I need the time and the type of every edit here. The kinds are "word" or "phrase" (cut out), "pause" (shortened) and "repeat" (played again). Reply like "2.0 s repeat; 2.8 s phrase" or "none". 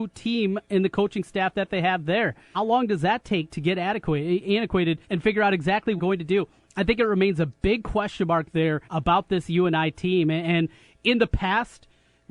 2.5 s word; 5.0 s pause; 6.0 s phrase; 8.8 s pause